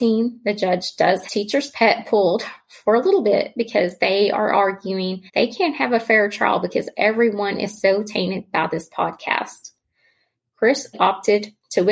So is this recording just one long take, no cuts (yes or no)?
no